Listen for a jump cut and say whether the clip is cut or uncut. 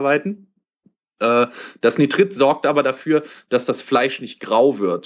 uncut